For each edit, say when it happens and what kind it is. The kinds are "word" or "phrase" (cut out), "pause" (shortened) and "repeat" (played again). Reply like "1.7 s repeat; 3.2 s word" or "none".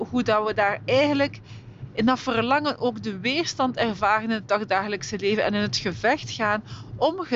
none